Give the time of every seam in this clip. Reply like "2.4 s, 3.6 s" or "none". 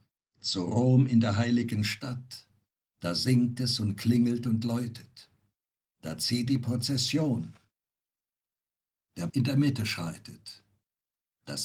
6.5 s, 9.3 s